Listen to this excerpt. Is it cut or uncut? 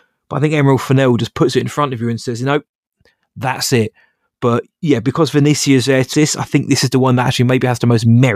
cut